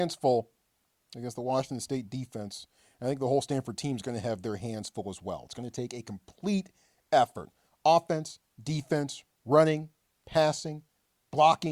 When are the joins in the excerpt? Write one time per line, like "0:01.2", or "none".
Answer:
none